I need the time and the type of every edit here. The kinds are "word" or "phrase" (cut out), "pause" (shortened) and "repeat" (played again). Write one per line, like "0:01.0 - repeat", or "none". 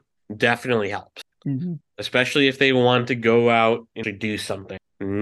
0:04.0 - word